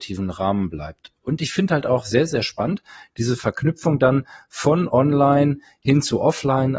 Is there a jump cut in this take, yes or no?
no